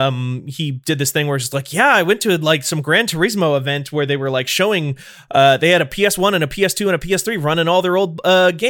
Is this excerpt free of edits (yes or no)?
yes